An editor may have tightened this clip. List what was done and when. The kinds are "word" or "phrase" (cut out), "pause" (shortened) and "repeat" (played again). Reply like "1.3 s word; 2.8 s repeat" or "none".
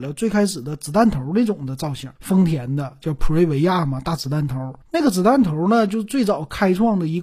2.2 s pause; 4.8 s pause